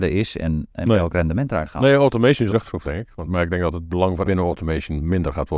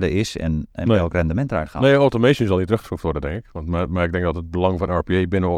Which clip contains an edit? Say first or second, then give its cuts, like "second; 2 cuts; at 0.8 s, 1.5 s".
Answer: first; 4 cuts; at 2.5 s, 2.8 s, 3.2 s, 4.2 s